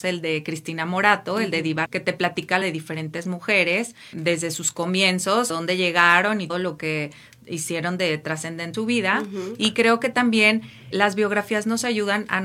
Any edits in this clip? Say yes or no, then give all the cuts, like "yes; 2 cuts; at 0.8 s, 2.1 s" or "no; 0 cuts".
yes; 7 cuts; at 1.9 s, 2.6 s, 4.1 s, 5.5 s, 6.5 s, 8.7 s, 10.9 s